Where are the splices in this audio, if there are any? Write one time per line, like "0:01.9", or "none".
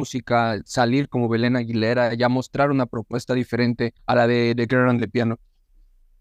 0:04.0